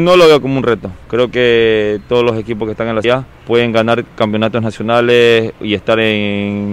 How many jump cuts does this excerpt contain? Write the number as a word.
two